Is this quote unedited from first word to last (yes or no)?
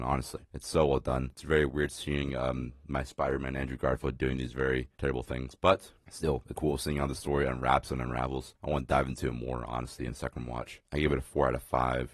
no